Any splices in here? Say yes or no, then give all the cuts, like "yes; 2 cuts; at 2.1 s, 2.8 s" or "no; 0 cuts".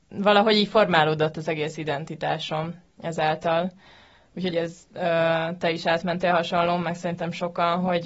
yes; 1 cut; at 4.5 s